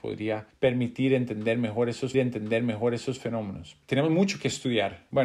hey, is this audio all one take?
no; 1 cut; at 2.1 s

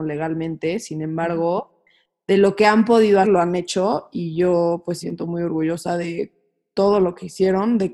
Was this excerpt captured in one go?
no; 2 cuts; at 3.2 s, 5.0 s

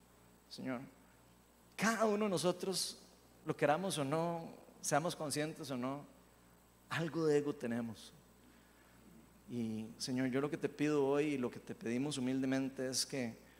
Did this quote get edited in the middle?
no; 0 cuts

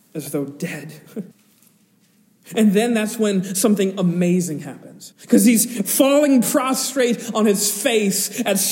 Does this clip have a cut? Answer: yes; 2 cuts; at 1.3 s, 5.1 s

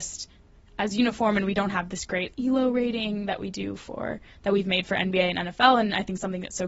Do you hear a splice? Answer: yes; 1 cut; at 2.3 s

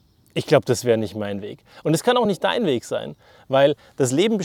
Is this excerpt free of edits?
yes; 0 cuts

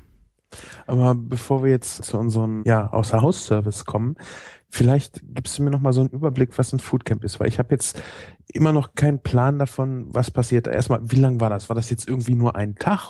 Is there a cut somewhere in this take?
yes; 2 cuts; at 2.0 s, 2.6 s

